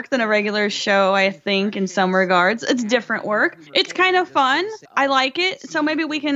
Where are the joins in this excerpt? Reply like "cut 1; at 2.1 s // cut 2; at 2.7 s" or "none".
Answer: cut 1; at 3.7 s // cut 2; at 4.8 s